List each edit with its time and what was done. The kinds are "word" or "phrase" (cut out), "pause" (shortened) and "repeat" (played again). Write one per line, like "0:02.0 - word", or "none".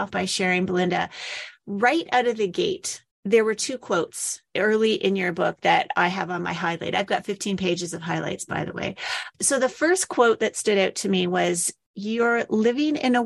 0:03.1 - pause